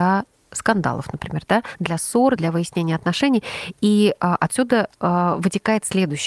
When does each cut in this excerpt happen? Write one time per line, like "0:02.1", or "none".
0:02.4
0:04.9